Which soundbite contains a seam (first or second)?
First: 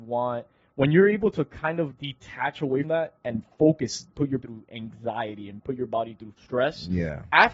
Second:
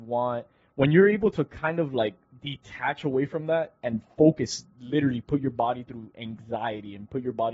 first